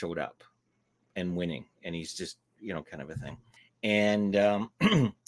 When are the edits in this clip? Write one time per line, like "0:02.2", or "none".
0:03.6

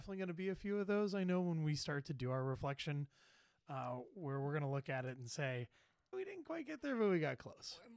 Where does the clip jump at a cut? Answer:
0:06.1

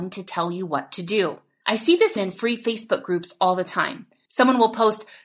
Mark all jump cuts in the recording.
0:02.2

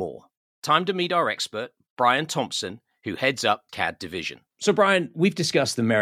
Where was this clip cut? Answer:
0:03.7
0:04.5

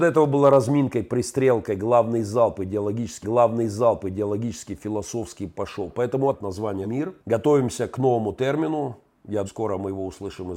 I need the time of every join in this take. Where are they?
0:03.2
0:06.3
0:06.8
0:07.2
0:09.5

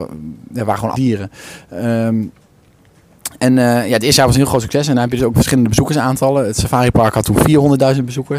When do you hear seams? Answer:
0:00.9
0:05.3

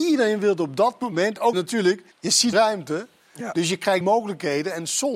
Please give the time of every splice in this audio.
0:01.5
0:02.1
0:02.5
0:04.0

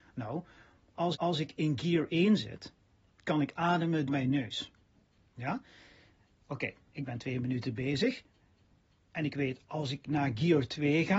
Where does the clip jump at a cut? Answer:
0:01.1
0:04.1

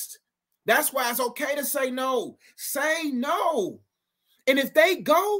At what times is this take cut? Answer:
none

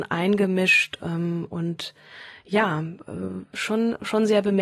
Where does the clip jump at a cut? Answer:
none

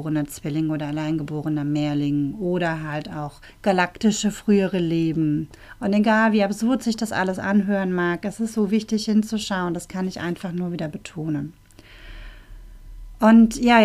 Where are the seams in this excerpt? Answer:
0:03.5

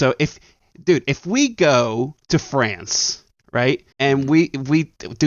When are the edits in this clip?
0:02.2
0:03.9

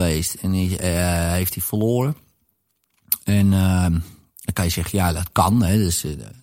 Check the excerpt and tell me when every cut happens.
none

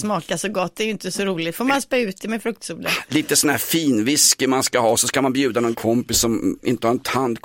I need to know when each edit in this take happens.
0:05.7

